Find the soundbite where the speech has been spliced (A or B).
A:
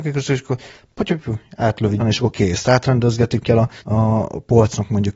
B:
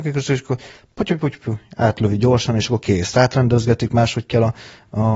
A